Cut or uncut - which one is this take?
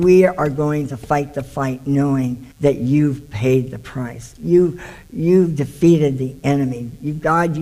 cut